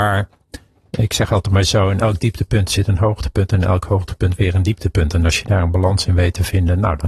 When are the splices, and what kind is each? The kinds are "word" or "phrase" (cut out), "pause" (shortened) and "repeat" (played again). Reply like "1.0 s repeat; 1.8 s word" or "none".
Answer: none